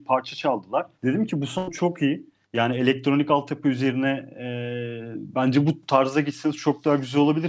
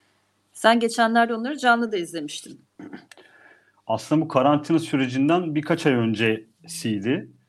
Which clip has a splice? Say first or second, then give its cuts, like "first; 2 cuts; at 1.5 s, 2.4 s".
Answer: first; 2 cuts; at 0.9 s, 2.4 s